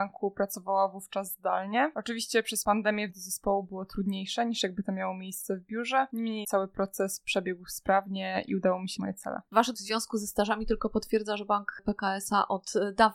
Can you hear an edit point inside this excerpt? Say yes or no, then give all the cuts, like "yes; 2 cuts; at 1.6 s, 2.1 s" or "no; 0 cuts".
yes; 4 cuts; at 3.1 s, 6.4 s, 9.0 s, 9.7 s